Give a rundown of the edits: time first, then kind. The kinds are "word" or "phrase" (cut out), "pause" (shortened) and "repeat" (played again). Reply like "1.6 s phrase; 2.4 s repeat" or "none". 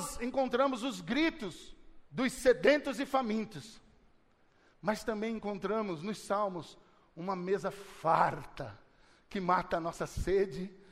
2.0 s pause